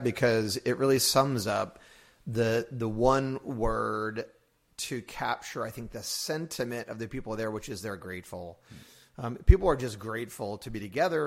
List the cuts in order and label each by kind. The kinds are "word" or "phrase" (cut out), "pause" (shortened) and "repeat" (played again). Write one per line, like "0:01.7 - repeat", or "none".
none